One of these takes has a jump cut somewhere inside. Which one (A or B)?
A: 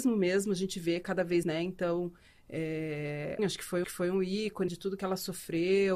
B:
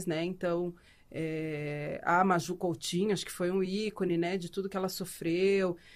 A